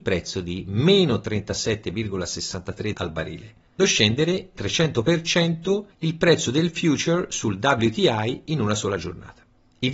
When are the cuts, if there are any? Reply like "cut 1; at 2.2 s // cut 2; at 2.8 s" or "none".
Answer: cut 1; at 2.9 s // cut 2; at 3.8 s // cut 3; at 4.5 s